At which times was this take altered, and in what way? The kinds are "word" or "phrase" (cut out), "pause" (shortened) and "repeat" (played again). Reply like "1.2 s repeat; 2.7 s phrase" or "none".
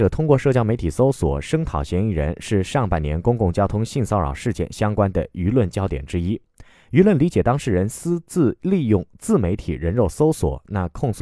none

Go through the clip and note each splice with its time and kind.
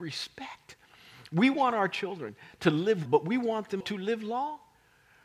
3.1 s word; 3.8 s word

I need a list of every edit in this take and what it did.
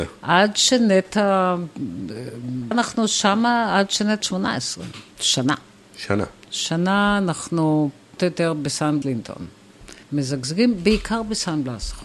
2.7 s word; 4.2 s word; 5.1 s pause; 8.2 s word; 9.0 s word; 10.0 s pause

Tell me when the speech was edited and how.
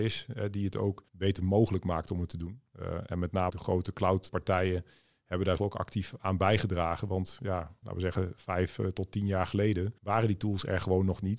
1.1 s pause; 2.7 s pause; 3.5 s word; 4.3 s word; 5.6 s word; 7.8 s word; 10.0 s pause

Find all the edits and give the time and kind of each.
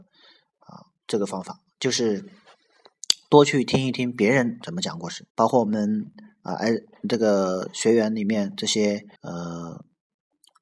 0.9 s pause; 5.3 s pause; 9.2 s pause

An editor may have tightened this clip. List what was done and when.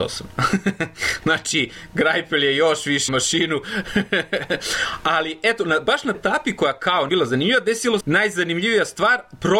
3.1 s word; 6.1 s word; 7.1 s word; 8.0 s word

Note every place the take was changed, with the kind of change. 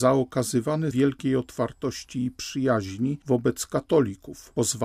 0.9 s word

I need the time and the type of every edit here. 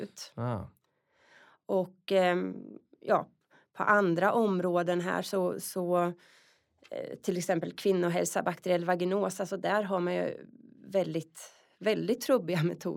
none

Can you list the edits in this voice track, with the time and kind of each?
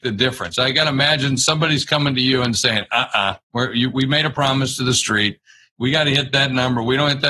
none

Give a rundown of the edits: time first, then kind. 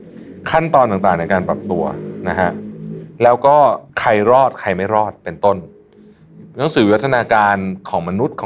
3.9 s pause

